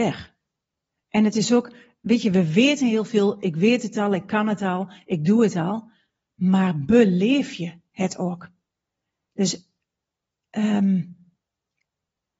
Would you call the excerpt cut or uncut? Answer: uncut